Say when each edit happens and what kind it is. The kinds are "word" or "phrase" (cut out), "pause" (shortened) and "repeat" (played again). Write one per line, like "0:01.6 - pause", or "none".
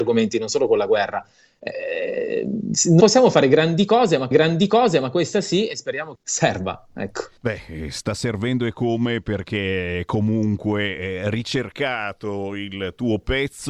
0:03.0 - word
0:04.3 - repeat
0:06.1 - phrase
0:07.4 - pause